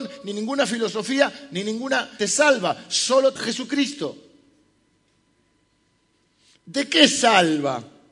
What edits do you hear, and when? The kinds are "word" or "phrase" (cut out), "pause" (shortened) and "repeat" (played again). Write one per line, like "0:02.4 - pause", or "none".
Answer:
0:02.2 - phrase
0:03.4 - word